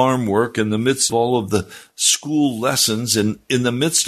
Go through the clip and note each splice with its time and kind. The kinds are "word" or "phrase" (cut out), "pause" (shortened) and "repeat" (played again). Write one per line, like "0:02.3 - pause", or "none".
0:01.1 - word